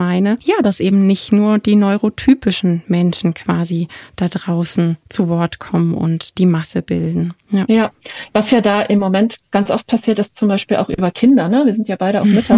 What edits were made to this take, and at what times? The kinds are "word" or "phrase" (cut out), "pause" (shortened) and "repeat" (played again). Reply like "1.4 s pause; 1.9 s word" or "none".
7.4 s pause